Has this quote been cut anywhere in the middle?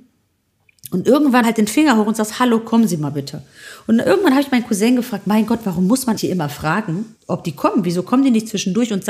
yes; 3 cuts; at 1.4 s, 6.2 s, 7.2 s

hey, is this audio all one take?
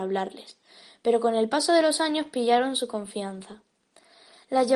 yes; 0 cuts

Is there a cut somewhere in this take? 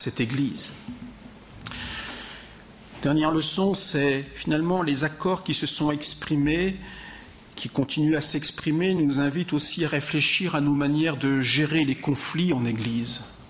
no; 0 cuts

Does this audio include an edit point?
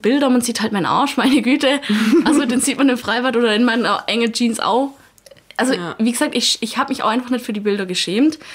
no; 0 cuts

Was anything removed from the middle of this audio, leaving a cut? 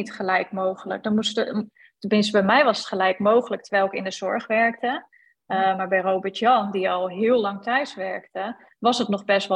no; 0 cuts

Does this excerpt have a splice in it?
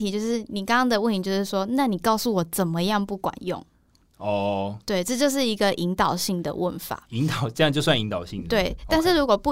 no; 0 cuts

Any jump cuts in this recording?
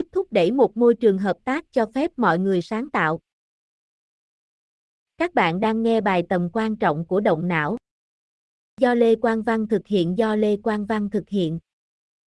no; 0 cuts

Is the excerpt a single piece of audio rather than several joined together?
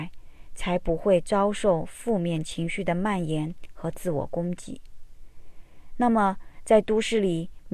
yes; 0 cuts

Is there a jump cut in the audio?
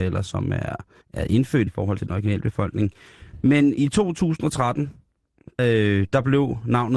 yes; 5 cuts; at 1.0 s, 1.7 s, 2.0 s, 3.8 s, 5.6 s

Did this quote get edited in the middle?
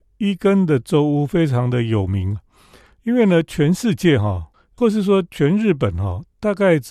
yes; 1 cut; at 4.5 s

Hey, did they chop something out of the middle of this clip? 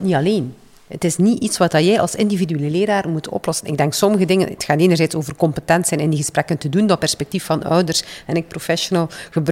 no; 0 cuts

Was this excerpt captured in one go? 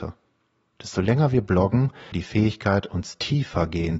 no; 1 cut; at 2.1 s

